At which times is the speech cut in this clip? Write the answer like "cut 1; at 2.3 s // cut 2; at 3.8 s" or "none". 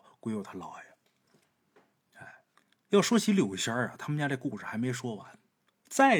cut 1; at 2.5 s